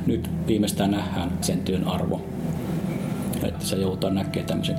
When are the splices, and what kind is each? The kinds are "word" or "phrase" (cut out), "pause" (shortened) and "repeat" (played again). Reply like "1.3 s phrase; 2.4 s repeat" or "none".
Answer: 1.4 s word; 3.5 s word

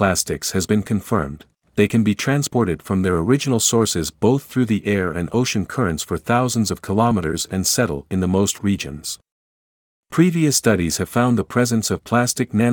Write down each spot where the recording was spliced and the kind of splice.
8.6 s word

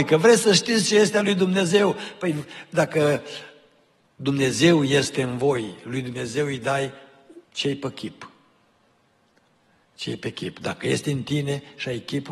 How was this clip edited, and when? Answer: 7.4 s pause

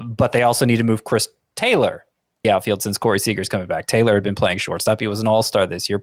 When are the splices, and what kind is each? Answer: 2.4 s word

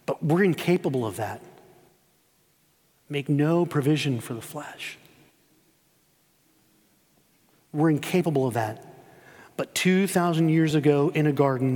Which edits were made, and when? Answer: none

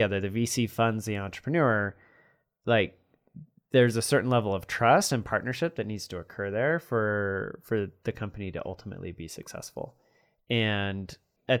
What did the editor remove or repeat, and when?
none

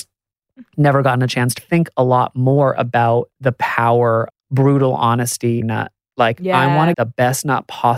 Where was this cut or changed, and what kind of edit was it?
1.6 s word; 4.3 s word; 5.6 s phrase; 6.9 s word

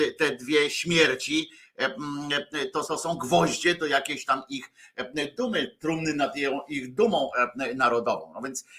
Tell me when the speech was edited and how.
2.8 s word

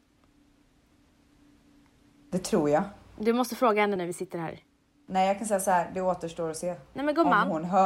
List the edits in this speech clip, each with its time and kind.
4.0 s word

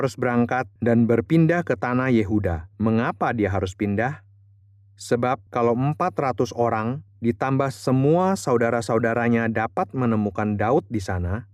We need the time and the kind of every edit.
2.7 s pause

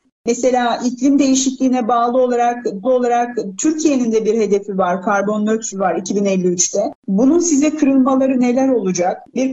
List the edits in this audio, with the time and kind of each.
2.8 s repeat; 5.7 s word

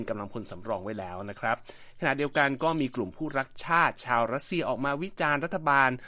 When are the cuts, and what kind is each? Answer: none

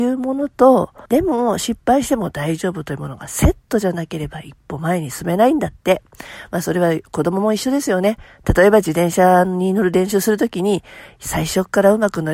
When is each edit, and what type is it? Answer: 1.0 s pause

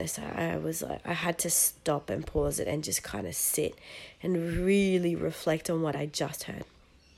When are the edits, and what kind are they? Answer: none

